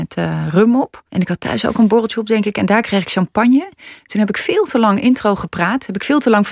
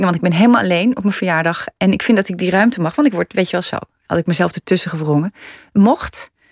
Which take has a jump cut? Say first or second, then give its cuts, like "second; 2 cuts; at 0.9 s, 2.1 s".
first; 1 cut; at 1.1 s